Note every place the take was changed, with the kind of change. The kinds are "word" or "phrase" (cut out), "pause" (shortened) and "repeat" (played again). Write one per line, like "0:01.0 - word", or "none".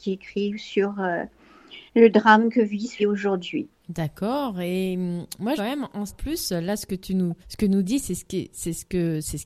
0:01.9 - pause
0:03.0 - word
0:03.8 - pause
0:05.6 - phrase
0:06.1 - word
0:07.4 - pause